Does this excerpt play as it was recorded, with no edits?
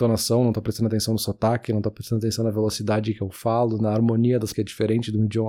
no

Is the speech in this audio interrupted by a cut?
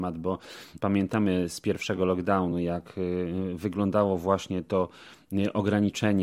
no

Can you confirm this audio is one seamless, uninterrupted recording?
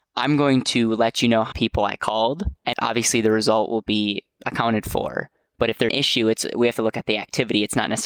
no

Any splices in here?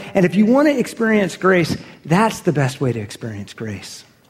no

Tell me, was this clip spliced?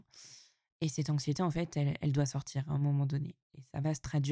no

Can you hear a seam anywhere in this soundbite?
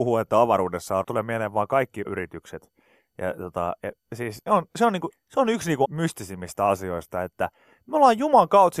yes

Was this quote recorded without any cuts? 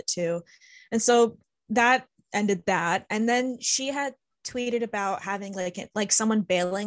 yes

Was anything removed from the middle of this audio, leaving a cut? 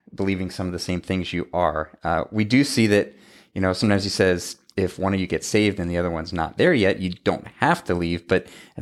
no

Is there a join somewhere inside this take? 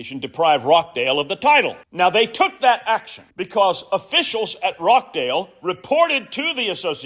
yes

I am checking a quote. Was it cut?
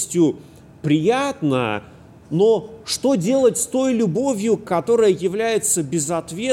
no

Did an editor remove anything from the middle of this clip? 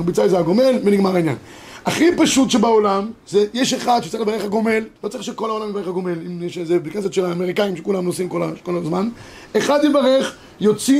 yes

